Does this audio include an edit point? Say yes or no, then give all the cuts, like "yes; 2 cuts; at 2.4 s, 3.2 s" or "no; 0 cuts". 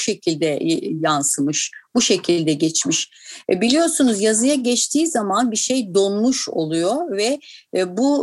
no; 0 cuts